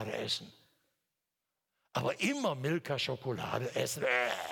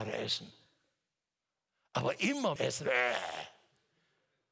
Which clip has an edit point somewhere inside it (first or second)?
second